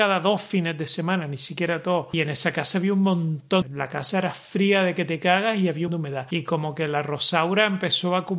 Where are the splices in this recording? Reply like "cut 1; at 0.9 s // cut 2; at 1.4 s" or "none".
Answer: cut 1; at 3.6 s // cut 2; at 5.9 s